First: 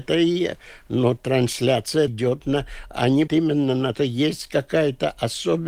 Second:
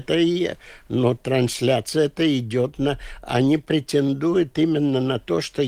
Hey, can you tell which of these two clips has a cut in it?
first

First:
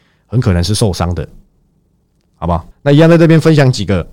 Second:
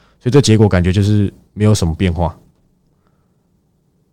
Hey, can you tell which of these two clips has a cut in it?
first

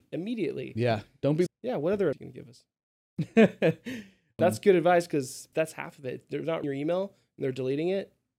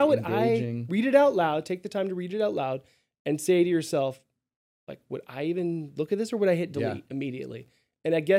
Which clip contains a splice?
first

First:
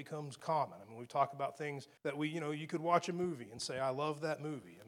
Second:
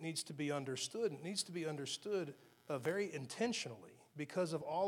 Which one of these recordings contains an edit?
first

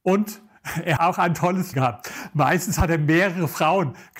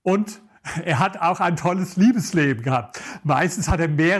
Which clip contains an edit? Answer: first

